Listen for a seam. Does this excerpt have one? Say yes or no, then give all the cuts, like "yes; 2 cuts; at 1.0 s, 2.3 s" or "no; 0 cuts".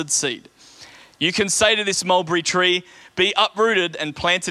no; 0 cuts